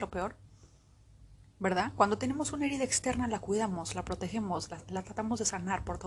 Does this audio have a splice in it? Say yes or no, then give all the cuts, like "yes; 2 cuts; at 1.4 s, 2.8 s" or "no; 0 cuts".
no; 0 cuts